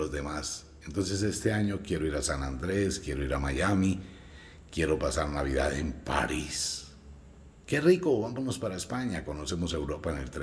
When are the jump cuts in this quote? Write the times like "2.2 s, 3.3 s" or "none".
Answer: none